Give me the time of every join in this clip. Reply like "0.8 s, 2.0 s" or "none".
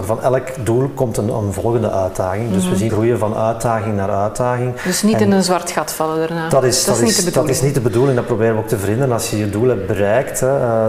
2.9 s